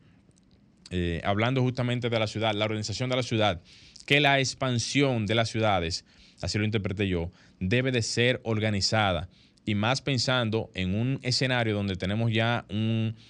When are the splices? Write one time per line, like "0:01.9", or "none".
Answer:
none